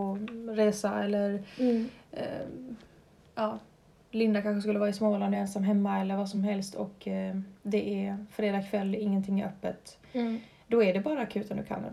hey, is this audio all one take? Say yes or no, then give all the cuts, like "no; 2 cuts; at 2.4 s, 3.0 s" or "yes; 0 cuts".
yes; 0 cuts